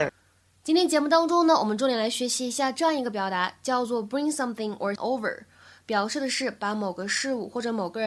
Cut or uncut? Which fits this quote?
cut